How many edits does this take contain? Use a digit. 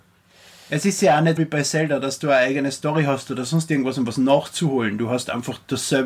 1